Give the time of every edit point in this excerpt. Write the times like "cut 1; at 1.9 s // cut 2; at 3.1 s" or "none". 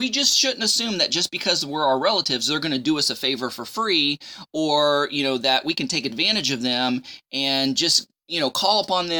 none